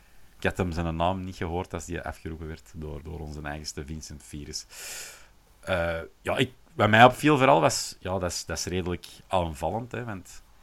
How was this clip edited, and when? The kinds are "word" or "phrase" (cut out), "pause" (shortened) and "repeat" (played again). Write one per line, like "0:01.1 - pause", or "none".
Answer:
0:03.0 - word